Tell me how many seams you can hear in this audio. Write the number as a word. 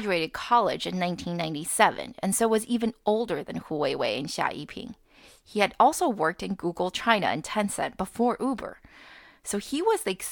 zero